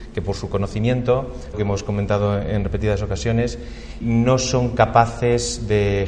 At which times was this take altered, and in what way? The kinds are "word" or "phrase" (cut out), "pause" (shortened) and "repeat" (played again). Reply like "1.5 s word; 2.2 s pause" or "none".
1.5 s word; 4.0 s word

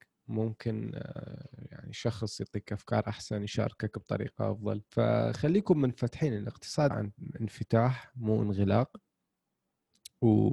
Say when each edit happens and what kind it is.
4.9 s pause; 6.9 s word

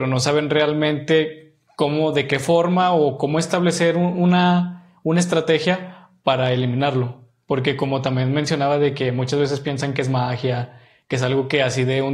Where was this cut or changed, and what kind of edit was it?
none

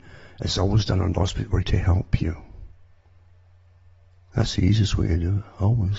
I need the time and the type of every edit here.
1.1 s word; 1.6 s word

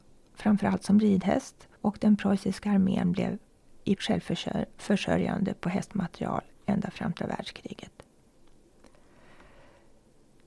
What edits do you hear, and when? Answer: 1.8 s pause; 4.0 s word; 7.2 s word

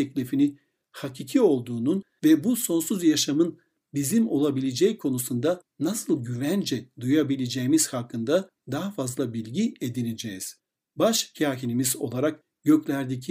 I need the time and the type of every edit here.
none

